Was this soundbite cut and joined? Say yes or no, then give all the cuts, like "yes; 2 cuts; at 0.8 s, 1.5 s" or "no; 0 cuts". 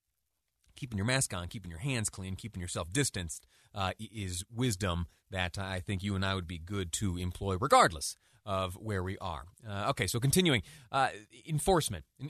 no; 0 cuts